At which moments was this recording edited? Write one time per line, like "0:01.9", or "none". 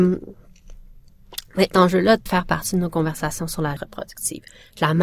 0:01.7
0:02.3
0:03.8